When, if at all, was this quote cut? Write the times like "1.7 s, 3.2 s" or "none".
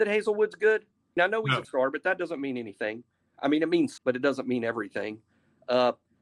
1.2 s, 1.6 s, 4.0 s